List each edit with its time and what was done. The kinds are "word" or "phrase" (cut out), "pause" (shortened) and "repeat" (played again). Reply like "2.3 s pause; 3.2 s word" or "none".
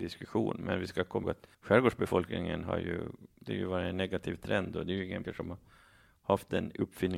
1.2 s word; 1.5 s pause; 5.2 s word